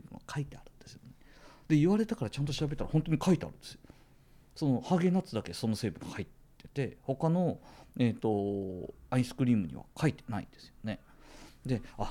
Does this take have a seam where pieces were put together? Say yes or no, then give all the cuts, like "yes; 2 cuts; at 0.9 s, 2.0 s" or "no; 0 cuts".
no; 0 cuts